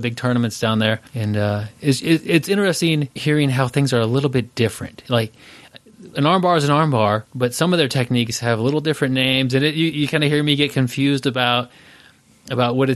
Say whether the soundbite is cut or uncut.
cut